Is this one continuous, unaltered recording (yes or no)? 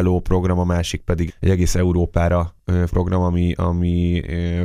no